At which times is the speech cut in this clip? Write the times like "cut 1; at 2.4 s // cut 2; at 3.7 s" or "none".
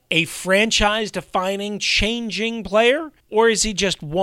cut 1; at 3.2 s